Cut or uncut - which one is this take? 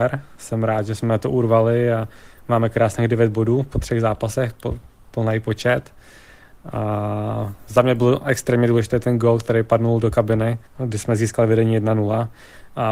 cut